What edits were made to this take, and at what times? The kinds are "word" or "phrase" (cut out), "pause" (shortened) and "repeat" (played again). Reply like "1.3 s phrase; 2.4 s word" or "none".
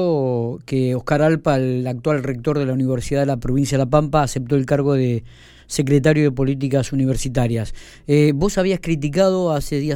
none